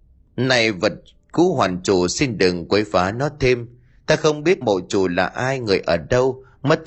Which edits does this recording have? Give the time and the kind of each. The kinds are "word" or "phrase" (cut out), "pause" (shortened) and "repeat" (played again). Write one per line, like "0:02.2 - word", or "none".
0:04.6 - word